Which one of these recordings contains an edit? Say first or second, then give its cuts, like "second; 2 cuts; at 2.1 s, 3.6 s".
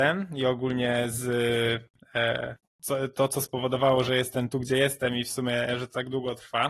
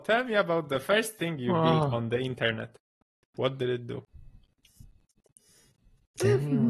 first; 1 cut; at 2.7 s